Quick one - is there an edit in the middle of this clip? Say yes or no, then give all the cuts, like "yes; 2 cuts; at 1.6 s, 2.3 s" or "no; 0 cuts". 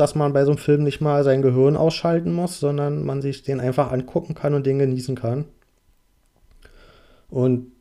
no; 0 cuts